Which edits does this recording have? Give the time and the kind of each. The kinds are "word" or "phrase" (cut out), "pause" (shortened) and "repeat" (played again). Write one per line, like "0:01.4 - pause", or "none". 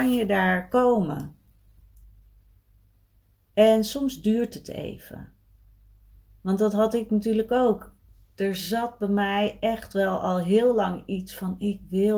none